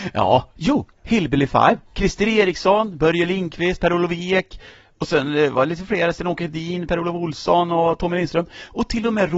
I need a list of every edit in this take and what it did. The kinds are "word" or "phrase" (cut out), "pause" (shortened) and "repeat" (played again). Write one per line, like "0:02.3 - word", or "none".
none

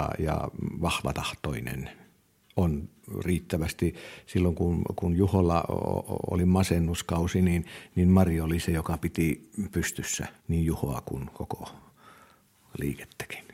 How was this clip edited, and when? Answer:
0:10.4 - pause

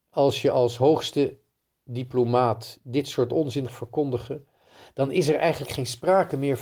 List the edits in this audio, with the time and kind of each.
0:03.7 - word

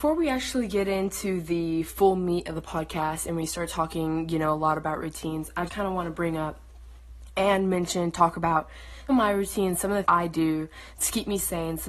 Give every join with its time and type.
0:05.7 - word
0:09.1 - word
0:10.0 - word

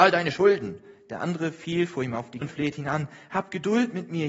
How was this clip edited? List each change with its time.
0:02.4 - word

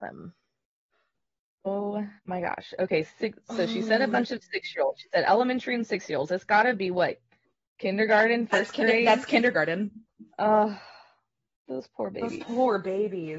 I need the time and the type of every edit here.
0:02.2 - pause
0:07.4 - pause
0:10.3 - pause

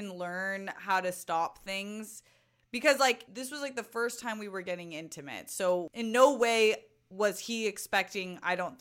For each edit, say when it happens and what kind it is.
none

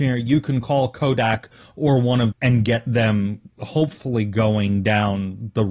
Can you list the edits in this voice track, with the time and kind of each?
0:02.3 - phrase

